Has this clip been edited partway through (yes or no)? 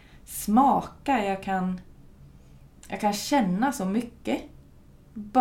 no